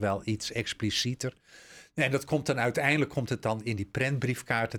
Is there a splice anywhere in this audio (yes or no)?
no